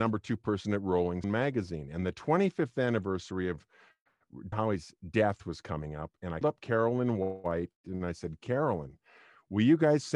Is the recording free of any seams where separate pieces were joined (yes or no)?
no